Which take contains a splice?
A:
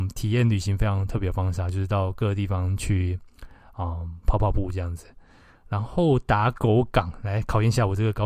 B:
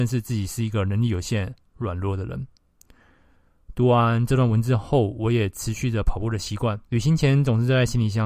B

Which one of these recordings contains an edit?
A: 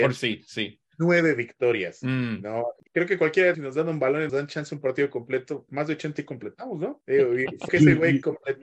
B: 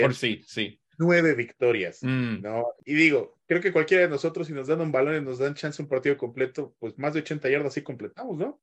A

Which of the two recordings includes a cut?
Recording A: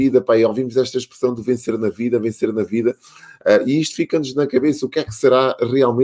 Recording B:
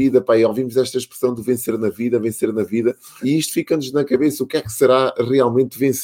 B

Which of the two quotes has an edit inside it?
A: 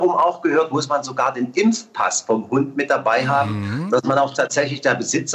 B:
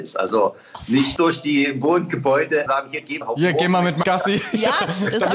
B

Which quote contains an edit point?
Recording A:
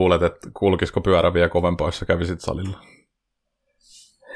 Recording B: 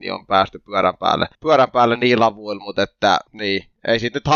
B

